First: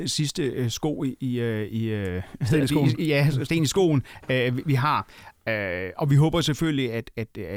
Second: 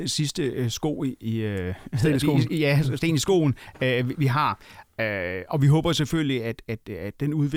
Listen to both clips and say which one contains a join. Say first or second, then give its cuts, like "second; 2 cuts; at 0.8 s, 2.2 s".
second; 1 cut; at 1.2 s